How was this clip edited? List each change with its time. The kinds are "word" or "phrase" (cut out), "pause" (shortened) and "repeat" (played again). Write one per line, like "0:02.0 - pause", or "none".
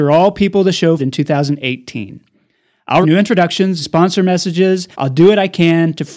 0:01.0 - word
0:03.0 - word
0:03.8 - word
0:04.9 - pause